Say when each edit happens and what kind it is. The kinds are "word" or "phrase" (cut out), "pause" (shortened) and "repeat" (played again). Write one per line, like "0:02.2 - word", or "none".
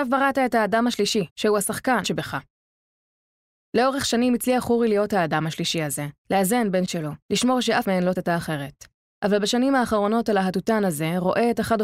0:01.3 - pause
0:02.0 - word
0:06.2 - pause
0:06.9 - phrase
0:07.2 - pause
0:07.8 - word
0:08.2 - word
0:09.0 - pause